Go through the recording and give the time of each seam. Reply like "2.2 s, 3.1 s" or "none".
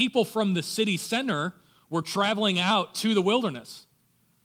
none